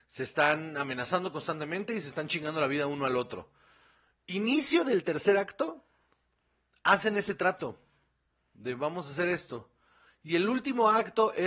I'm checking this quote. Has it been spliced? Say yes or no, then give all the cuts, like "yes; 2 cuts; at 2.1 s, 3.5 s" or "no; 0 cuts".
no; 0 cuts